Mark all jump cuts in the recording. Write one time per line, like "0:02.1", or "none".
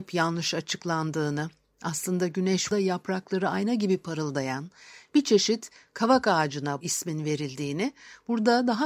0:02.7
0:06.8